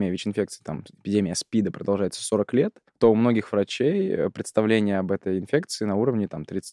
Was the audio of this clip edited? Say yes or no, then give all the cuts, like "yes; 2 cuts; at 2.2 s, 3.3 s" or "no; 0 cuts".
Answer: yes; 1 cut; at 2.9 s